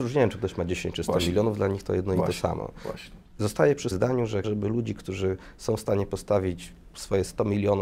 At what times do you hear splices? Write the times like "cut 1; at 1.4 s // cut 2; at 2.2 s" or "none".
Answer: cut 1; at 3.2 s // cut 2; at 3.9 s // cut 3; at 4.4 s

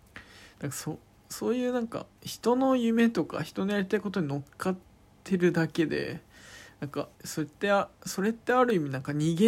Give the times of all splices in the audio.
cut 1; at 2.2 s // cut 2; at 7.1 s

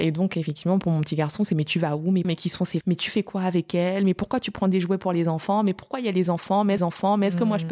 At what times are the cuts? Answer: cut 1; at 2.2 s // cut 2; at 2.8 s // cut 3; at 6.8 s

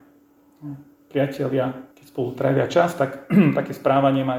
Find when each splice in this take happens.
cut 1; at 1.9 s

